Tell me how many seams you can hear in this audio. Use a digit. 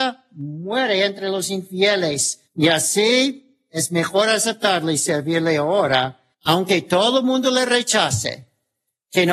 2